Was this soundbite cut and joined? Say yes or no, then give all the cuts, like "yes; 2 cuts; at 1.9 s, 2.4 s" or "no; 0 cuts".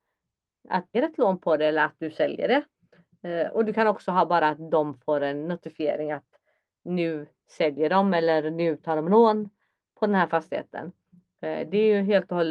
yes; 1 cut; at 0.9 s